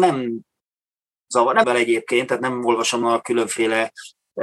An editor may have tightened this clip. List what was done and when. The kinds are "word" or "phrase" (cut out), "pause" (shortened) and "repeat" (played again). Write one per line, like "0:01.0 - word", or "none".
0:01.6 - phrase
0:03.0 - word